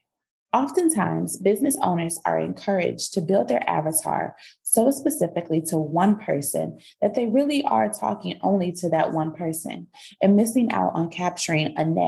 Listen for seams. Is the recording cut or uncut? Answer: uncut